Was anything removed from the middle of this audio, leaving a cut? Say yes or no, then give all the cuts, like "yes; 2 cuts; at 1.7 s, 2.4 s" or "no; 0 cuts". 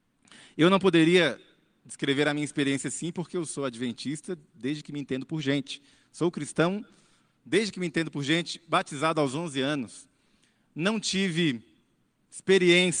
no; 0 cuts